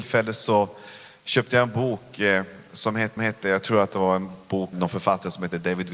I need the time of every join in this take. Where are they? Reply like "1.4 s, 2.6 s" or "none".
3.2 s, 4.7 s